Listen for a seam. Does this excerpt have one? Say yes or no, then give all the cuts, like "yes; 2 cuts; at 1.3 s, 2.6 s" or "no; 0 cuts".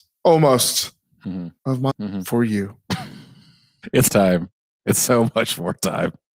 yes; 3 cuts; at 1.6 s, 1.9 s, 4.1 s